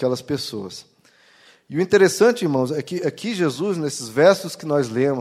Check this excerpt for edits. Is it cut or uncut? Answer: uncut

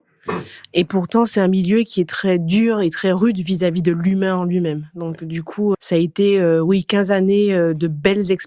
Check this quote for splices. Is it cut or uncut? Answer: cut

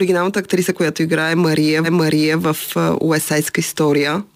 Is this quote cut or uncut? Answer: cut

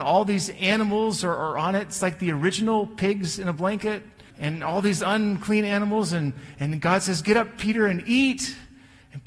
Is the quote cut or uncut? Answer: cut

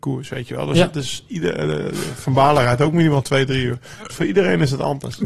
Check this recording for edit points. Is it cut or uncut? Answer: uncut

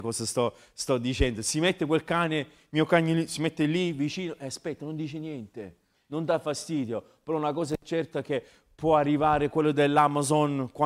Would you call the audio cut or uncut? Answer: uncut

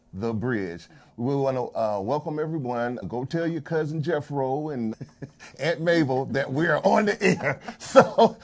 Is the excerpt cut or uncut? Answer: cut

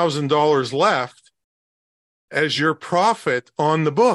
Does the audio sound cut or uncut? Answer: uncut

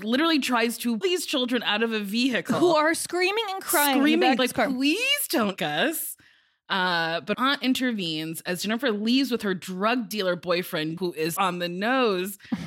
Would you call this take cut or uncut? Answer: cut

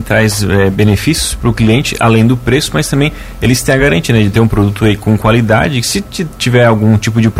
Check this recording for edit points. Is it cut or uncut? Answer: uncut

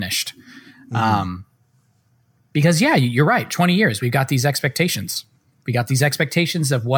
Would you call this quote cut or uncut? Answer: uncut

